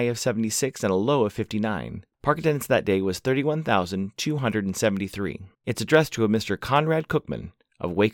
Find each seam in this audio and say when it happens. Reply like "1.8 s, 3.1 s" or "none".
2.1 s, 5.5 s